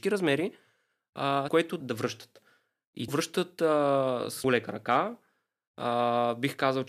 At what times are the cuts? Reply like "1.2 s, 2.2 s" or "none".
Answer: 1.5 s, 1.8 s, 3.1 s, 4.4 s